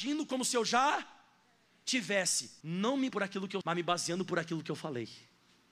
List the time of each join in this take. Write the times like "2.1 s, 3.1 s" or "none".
2.6 s, 3.1 s, 3.6 s